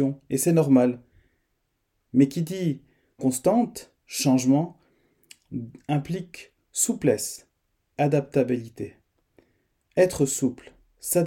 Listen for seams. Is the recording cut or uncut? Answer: cut